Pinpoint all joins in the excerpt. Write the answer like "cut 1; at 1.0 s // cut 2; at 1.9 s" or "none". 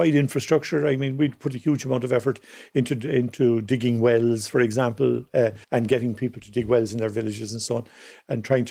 cut 1; at 5.6 s